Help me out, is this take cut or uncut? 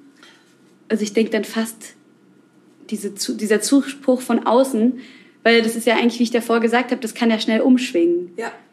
uncut